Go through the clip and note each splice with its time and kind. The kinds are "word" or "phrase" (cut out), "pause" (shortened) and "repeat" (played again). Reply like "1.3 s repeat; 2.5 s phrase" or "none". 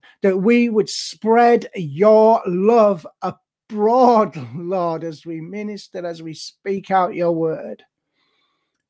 none